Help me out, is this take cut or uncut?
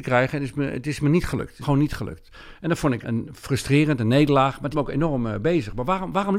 cut